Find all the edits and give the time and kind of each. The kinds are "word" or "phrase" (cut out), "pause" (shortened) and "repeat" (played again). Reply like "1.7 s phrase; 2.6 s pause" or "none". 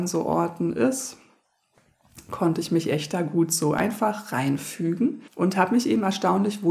5.3 s pause